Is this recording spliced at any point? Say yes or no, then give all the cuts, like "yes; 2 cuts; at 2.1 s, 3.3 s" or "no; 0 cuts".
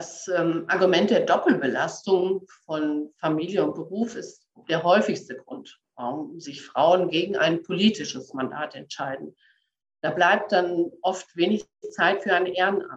no; 0 cuts